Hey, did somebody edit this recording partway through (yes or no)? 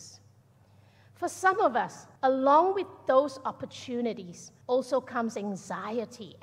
yes